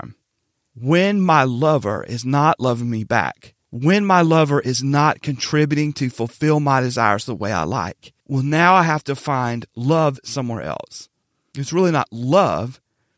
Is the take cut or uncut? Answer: cut